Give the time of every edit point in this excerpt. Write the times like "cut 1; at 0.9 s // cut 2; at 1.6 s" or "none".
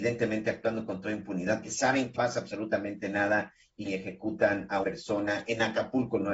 cut 1; at 1.6 s // cut 2; at 2.1 s // cut 3; at 3.8 s // cut 4; at 4.8 s